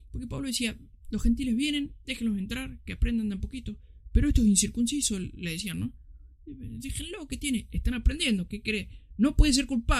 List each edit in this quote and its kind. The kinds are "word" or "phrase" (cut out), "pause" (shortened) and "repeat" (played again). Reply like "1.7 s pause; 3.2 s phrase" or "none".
none